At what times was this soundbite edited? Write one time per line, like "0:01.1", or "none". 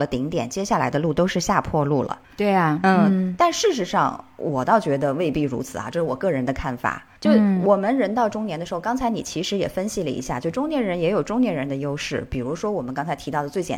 0:02.2
0:07.2

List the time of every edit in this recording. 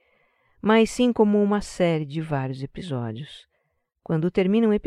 none

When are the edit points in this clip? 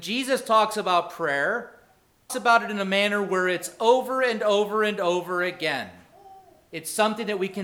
0:02.3

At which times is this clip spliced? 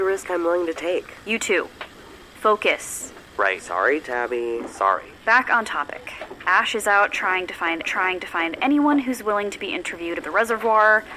0:03.3
0:05.2
0:07.8
0:10.2

